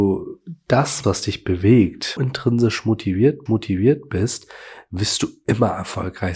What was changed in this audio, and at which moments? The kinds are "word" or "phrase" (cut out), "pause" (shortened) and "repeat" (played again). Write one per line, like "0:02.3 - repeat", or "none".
0:01.0 - word
0:02.2 - phrase
0:03.5 - repeat